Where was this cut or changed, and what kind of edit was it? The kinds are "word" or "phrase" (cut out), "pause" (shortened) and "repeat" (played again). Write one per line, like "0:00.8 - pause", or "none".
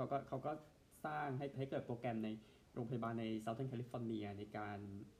0:01.5 - phrase